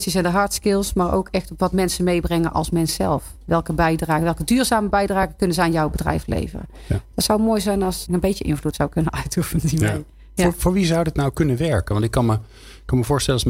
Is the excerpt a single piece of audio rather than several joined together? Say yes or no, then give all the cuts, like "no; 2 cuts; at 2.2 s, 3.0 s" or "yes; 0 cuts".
no; 2 cuts; at 8.1 s, 8.7 s